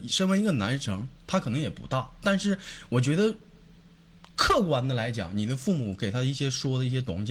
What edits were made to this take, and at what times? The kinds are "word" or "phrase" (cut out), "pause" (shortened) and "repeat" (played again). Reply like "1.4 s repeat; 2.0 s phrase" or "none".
none